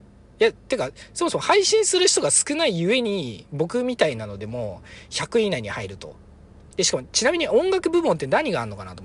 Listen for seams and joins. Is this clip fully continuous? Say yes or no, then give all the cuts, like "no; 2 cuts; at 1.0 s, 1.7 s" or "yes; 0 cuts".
yes; 0 cuts